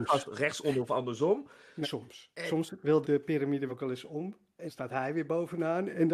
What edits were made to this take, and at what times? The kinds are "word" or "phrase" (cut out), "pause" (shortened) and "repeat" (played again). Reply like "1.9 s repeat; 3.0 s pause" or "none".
1.8 s word; 3.0 s word; 3.7 s word; 4.7 s word